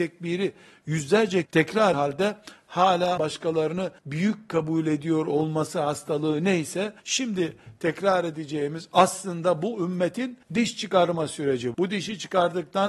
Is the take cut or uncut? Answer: cut